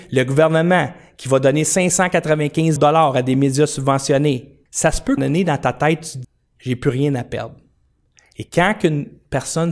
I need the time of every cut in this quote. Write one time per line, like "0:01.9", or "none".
0:02.8
0:04.7
0:05.2
0:06.2